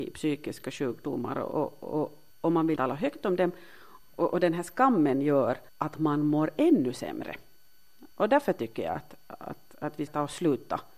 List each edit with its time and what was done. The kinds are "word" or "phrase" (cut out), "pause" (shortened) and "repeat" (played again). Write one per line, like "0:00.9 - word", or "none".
0:02.3 - pause
0:02.8 - word
0:05.7 - pause
0:08.1 - pause
0:10.1 - word